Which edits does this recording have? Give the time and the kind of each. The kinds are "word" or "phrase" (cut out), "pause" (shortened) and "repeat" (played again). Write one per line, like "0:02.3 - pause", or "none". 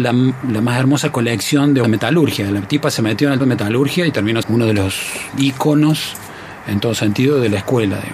0:01.8 - word
0:03.4 - word
0:04.4 - word
0:05.4 - word

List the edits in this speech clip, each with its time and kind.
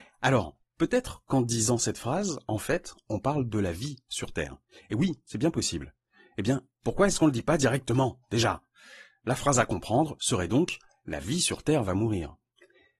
none

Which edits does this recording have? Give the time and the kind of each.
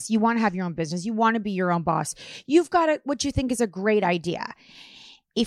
none

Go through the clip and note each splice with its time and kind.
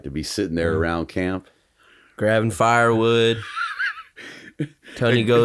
none

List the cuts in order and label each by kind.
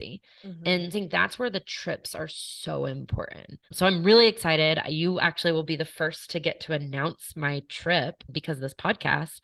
0:00.9 - phrase
0:03.6 - pause

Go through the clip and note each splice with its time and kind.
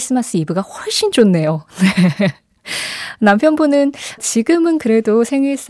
0:04.2 - word

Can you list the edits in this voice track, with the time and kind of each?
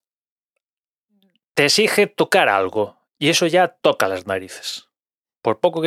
none

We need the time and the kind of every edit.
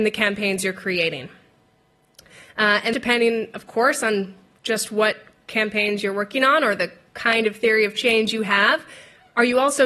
0:02.9 - word

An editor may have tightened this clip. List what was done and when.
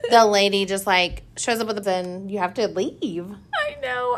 0:01.8 - word

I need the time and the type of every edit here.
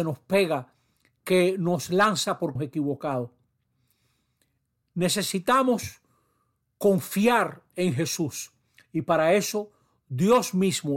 0:02.6 - word

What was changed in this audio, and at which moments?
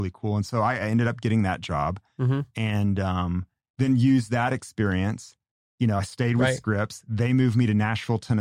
none

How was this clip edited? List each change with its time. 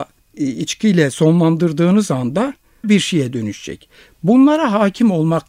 0:02.8 - word

